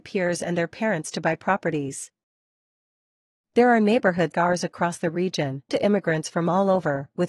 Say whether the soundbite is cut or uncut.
cut